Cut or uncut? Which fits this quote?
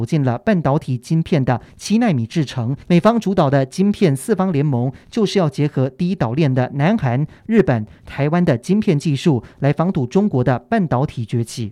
cut